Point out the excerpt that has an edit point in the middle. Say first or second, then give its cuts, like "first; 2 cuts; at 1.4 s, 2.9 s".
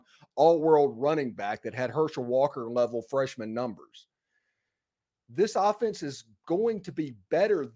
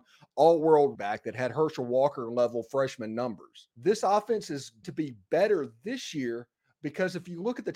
second; 3 cuts; at 0.9 s, 3.7 s, 4.8 s